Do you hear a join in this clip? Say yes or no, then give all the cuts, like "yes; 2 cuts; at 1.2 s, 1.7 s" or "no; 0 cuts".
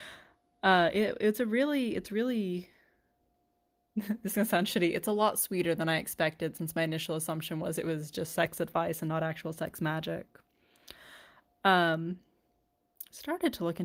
no; 0 cuts